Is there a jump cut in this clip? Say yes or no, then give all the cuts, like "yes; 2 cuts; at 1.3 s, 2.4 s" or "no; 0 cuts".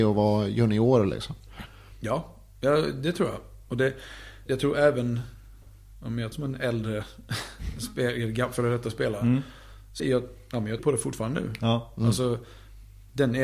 yes; 4 cuts; at 4.5 s, 6.3 s, 10.0 s, 10.8 s